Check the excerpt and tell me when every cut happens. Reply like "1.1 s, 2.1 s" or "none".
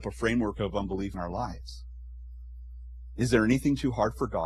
1.1 s